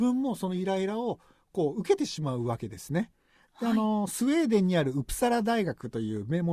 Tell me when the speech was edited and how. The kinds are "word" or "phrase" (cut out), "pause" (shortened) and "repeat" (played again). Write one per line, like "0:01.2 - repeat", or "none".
none